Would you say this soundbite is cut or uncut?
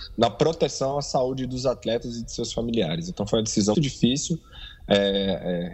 cut